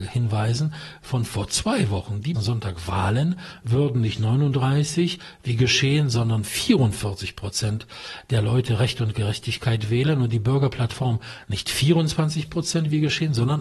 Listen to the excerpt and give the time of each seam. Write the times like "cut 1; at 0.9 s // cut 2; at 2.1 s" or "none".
cut 1; at 2.3 s